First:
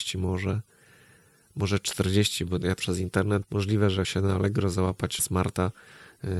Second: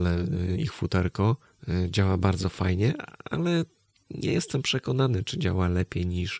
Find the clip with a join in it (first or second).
first